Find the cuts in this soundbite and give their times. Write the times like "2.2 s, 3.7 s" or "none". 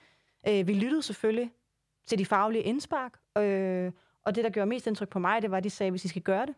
none